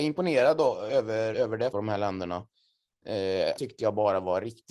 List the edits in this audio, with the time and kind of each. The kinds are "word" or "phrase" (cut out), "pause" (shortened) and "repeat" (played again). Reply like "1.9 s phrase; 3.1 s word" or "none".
1.3 s word; 1.7 s word; 3.6 s word